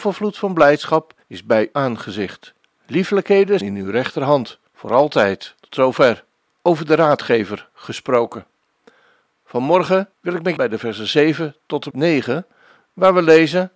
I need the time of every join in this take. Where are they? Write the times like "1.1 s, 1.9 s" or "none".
1.2 s, 1.7 s, 3.6 s, 4.7 s, 5.6 s, 6.5 s, 10.1 s, 10.6 s, 11.9 s

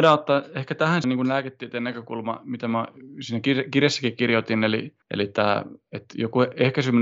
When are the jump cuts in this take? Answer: 1.0 s, 5.0 s

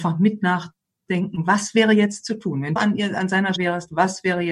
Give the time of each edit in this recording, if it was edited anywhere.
2.8 s, 3.6 s

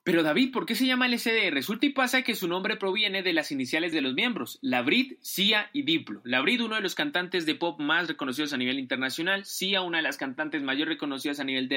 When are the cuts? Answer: 3.9 s

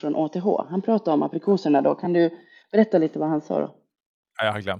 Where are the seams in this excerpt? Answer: none

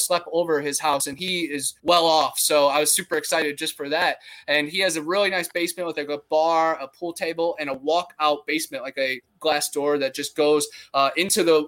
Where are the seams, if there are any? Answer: 1.8 s

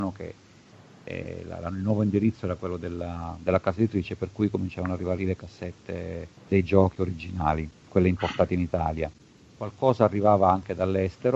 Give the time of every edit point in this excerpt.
5.2 s, 6.4 s

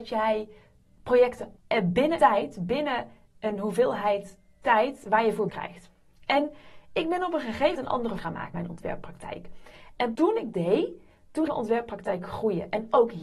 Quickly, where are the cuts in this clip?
1.6 s, 2.2 s, 5.5 s, 7.7 s, 8.2 s, 8.5 s, 10.1 s, 10.5 s, 11.5 s

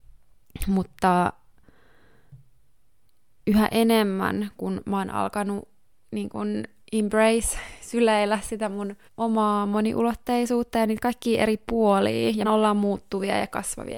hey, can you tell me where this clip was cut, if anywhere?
6.8 s, 9.1 s, 12.4 s

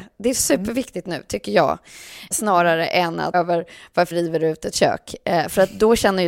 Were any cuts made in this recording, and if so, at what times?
2.3 s, 3.3 s, 4.1 s

